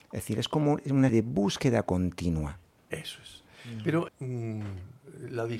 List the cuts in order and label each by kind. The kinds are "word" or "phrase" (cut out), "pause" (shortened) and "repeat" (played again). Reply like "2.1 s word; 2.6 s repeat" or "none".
1.1 s word; 4.1 s word